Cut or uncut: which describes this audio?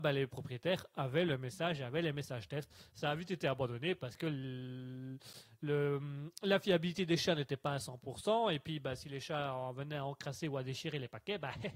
uncut